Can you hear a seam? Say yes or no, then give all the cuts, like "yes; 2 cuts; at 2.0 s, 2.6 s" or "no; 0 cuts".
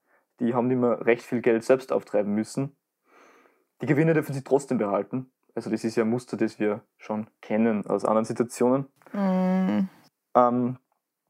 no; 0 cuts